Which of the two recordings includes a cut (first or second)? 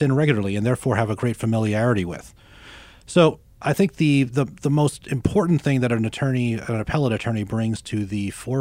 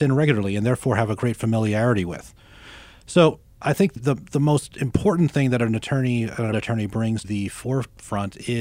second